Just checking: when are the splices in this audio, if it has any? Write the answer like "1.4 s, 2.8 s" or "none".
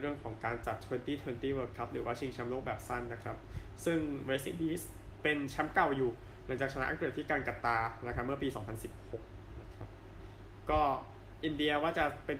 none